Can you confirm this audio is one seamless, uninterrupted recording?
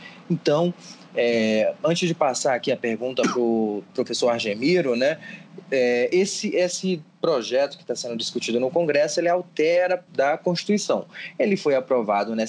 no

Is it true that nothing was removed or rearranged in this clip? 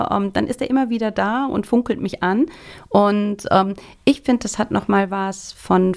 yes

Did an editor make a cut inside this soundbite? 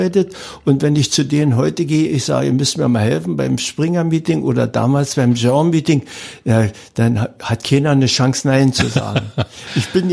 no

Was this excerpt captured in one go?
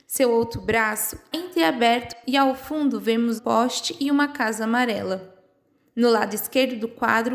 no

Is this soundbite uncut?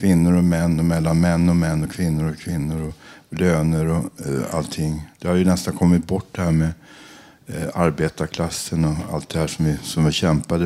yes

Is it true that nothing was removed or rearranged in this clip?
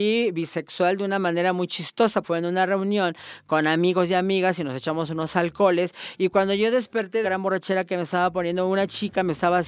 no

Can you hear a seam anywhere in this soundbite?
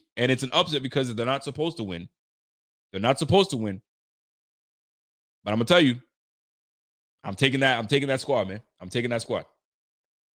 no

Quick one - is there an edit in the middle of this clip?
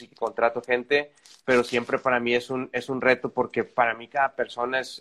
no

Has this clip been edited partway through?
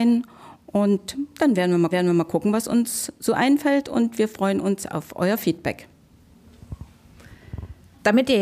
yes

